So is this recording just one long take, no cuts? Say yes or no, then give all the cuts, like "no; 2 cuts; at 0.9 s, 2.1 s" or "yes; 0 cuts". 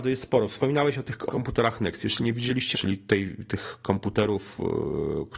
no; 2 cuts; at 1.3 s, 2.7 s